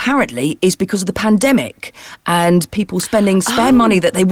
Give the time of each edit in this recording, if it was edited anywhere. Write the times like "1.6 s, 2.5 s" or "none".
none